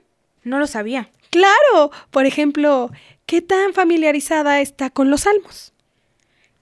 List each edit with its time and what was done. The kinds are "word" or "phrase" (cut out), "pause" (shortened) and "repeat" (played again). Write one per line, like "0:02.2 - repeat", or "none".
none